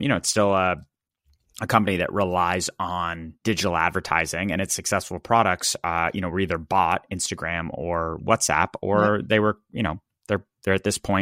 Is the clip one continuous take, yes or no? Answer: no